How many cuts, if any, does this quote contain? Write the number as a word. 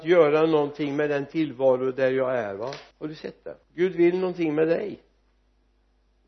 two